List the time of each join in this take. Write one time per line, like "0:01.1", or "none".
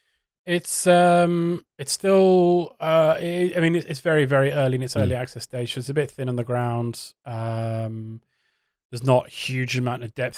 0:01.7